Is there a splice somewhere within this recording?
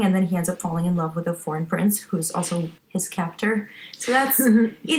yes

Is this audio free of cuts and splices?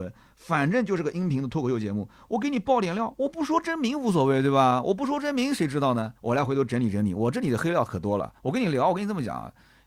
no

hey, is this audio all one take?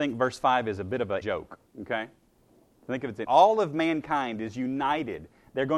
no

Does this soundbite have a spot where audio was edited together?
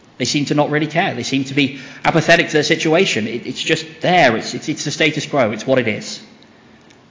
no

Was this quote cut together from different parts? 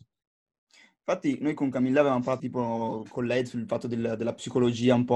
yes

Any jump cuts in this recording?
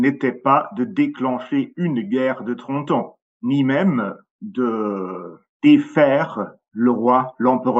yes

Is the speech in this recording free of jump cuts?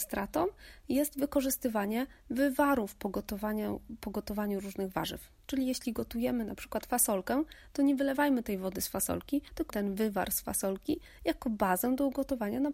no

